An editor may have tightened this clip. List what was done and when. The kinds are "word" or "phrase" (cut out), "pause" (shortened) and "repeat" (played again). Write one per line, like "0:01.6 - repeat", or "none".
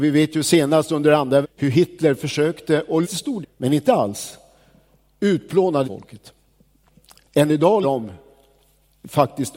0:01.4 - word
0:03.0 - word
0:03.4 - word
0:05.8 - word
0:07.8 - word